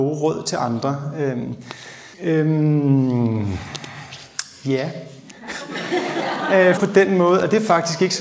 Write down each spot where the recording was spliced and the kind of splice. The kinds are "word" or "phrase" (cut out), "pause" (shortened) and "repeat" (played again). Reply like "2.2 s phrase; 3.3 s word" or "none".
2.1 s pause; 6.8 s word